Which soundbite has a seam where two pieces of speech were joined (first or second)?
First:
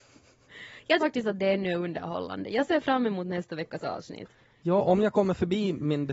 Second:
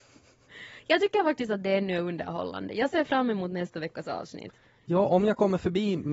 first